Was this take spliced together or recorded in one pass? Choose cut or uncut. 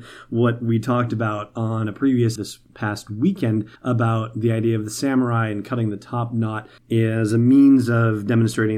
cut